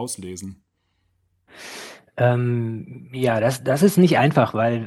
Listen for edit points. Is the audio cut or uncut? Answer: uncut